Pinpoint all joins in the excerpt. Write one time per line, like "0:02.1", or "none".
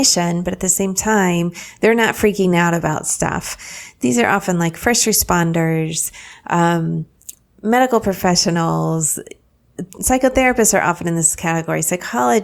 none